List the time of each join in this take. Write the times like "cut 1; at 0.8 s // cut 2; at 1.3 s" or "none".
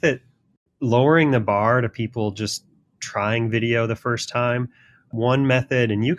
none